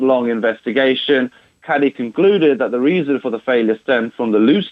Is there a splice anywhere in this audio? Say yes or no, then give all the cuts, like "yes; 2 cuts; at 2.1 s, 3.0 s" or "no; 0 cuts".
no; 0 cuts